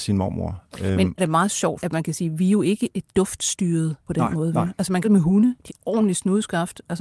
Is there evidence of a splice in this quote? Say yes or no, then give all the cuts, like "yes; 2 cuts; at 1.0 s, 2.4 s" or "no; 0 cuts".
yes; 6 cuts; at 1.2 s, 1.8 s, 2.9 s, 4.1 s, 5.0 s, 5.7 s